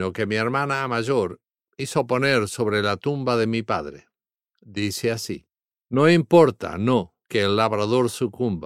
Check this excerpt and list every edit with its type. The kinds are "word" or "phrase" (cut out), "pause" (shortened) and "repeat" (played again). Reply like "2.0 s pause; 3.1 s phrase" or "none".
5.7 s pause